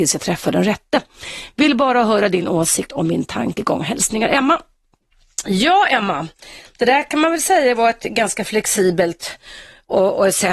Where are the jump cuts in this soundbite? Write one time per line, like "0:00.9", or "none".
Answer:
none